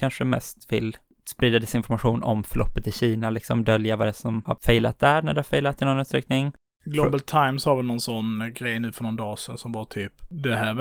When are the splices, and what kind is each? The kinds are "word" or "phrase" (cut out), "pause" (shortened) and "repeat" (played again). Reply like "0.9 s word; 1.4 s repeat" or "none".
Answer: none